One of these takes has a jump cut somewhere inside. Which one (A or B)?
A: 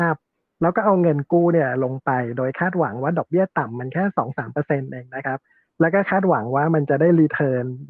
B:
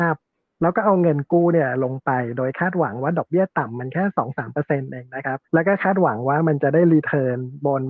B